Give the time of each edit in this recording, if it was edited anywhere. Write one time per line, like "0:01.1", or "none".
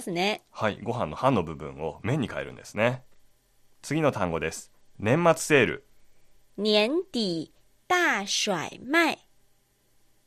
none